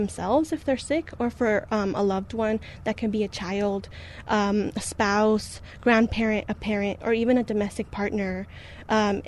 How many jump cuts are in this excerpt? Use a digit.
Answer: 0